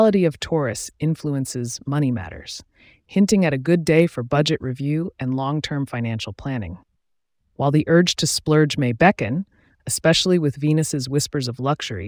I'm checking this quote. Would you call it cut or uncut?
uncut